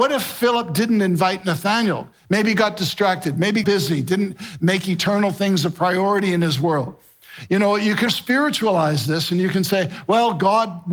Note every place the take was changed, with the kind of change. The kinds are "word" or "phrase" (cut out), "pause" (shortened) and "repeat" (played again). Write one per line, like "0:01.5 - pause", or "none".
0:03.6 - word
0:08.1 - word